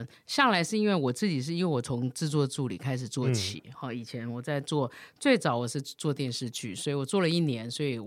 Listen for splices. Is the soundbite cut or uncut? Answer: uncut